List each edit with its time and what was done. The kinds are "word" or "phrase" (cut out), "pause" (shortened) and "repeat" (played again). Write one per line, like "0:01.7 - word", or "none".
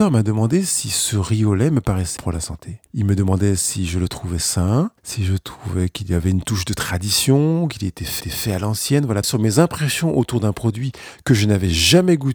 0:02.2 - word
0:02.9 - pause
0:05.0 - pause
0:08.2 - repeat
0:09.2 - phrase